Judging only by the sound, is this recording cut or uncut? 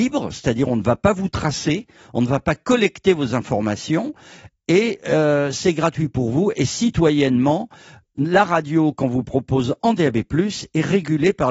uncut